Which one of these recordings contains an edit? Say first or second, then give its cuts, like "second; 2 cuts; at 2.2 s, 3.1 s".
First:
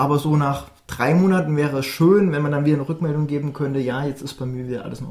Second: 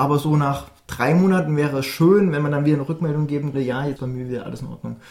second; 2 cuts; at 3.5 s, 4.0 s